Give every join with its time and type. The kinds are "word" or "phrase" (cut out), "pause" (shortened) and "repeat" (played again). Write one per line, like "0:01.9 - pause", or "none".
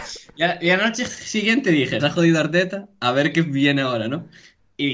0:02.0 - phrase